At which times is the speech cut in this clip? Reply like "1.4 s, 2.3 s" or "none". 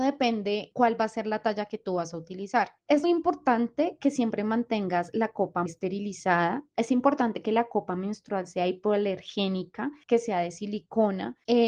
3.0 s, 5.7 s